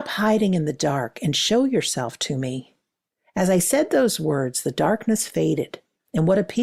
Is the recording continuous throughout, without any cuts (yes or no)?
yes